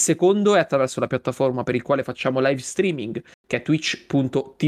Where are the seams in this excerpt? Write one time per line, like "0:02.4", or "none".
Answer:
none